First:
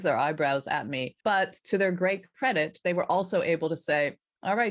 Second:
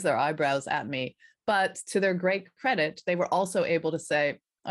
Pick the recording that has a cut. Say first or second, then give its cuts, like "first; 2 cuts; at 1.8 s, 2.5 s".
first; 1 cut; at 1.2 s